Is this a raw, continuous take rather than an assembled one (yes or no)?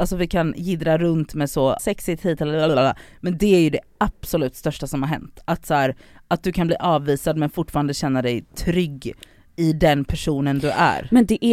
no